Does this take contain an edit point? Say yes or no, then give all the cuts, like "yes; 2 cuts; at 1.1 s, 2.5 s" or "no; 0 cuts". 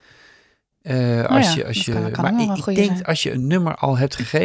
no; 0 cuts